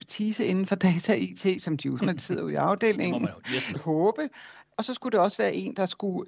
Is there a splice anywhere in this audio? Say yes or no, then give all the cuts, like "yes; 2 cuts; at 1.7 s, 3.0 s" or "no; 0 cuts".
yes; 2 cuts; at 2.0 s, 3.8 s